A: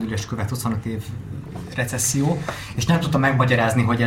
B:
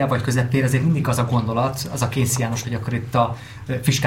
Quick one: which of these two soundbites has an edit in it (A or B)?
B